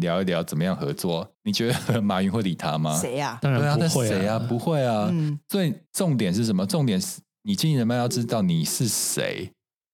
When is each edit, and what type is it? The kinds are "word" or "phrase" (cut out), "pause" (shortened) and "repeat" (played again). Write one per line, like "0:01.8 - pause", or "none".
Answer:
0:01.3 - pause
0:05.9 - pause